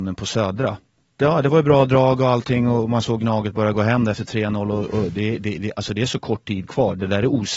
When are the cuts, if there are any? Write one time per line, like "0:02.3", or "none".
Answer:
none